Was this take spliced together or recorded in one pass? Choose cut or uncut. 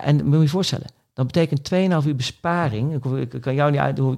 uncut